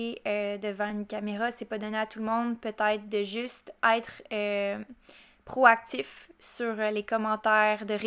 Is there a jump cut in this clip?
no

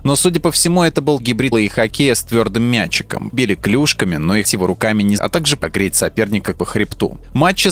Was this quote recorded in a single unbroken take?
no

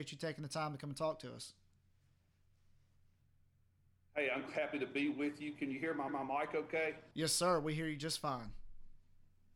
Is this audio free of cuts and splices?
no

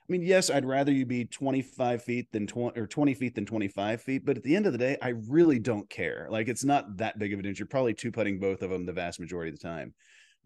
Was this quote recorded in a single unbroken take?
yes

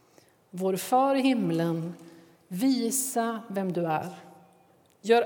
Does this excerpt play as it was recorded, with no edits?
yes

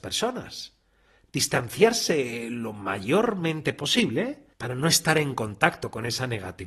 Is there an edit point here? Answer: yes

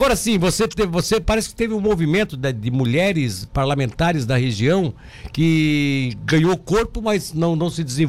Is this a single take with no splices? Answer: yes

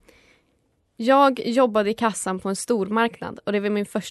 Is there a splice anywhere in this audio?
no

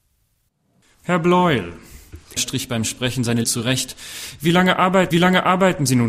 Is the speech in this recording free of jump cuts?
no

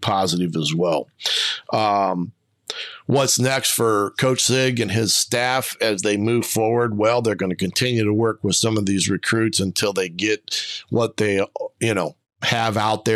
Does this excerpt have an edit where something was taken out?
no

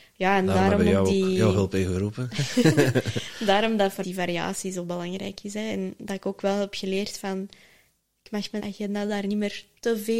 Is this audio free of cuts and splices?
no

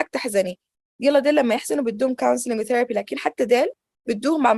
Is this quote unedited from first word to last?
yes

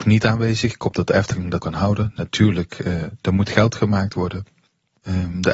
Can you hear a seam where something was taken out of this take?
yes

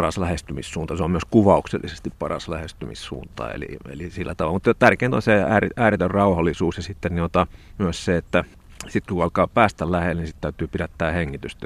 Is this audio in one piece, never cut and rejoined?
yes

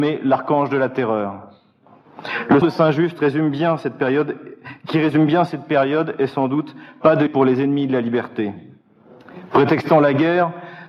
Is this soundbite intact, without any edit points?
no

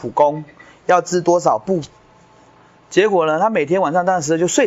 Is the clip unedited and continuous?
yes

